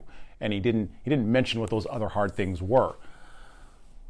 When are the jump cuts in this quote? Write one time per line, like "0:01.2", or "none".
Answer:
none

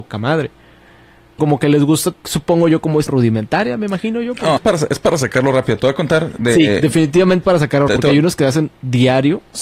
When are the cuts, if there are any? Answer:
0:01.4
0:02.1
0:03.1
0:04.6
0:07.4
0:07.9

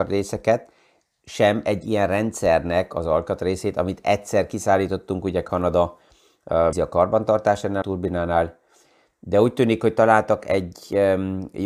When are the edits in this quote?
0:06.7
0:07.8

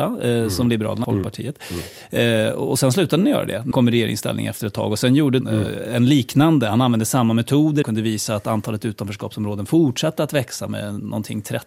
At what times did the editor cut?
0:01.0
0:03.7
0:05.4
0:07.8

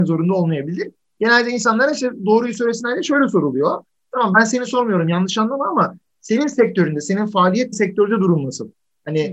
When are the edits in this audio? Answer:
0:07.7

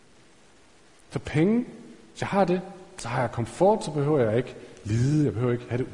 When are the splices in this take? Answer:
none

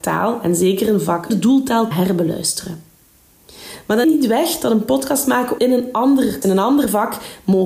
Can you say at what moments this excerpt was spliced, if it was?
0:01.3
0:01.9
0:04.0
0:05.6
0:06.4

